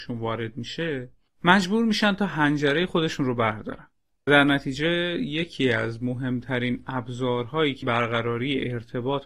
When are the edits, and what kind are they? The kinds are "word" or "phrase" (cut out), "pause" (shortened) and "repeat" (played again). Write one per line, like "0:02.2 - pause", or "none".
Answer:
0:04.3 - word
0:07.8 - word

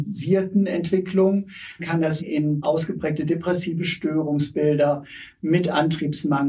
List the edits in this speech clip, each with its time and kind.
0:01.8 - word
0:02.2 - word
0:02.6 - word

